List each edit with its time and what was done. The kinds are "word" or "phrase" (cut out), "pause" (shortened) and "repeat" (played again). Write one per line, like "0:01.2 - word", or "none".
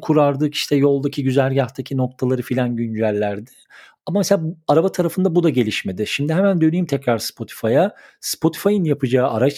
none